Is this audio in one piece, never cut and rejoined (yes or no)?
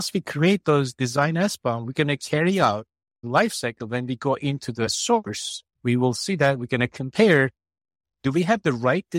no